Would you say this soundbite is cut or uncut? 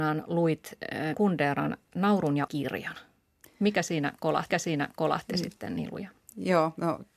cut